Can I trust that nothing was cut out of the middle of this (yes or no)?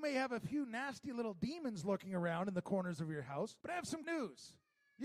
no